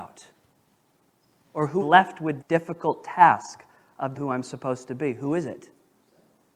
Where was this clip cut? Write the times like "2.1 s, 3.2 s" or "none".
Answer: 1.8 s, 2.4 s, 4.1 s